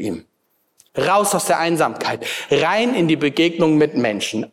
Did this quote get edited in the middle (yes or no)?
no